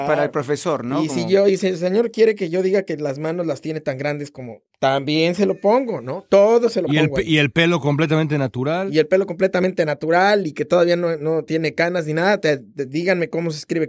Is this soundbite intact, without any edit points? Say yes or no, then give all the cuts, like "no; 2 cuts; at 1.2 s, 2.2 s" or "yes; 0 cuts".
yes; 0 cuts